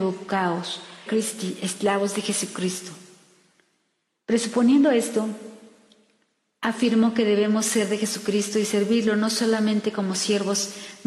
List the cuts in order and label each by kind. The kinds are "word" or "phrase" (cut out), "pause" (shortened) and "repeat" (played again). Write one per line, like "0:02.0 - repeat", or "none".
0:01.1 - phrase